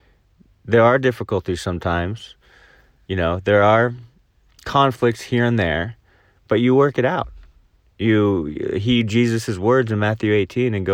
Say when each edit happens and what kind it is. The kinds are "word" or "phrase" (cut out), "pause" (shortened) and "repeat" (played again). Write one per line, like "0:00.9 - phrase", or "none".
none